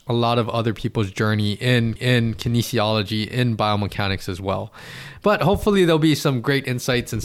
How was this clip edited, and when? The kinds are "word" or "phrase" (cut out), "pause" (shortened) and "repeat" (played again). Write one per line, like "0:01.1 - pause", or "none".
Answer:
0:02.0 - repeat